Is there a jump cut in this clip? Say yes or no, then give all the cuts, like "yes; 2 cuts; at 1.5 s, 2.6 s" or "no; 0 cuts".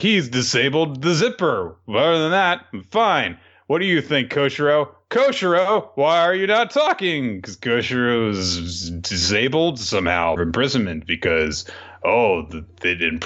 yes; 1 cut; at 10.4 s